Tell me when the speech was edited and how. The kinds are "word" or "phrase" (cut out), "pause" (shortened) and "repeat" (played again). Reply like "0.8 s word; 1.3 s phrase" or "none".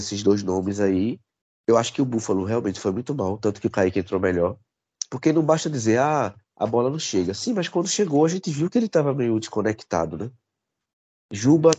1.4 s pause; 6.4 s pause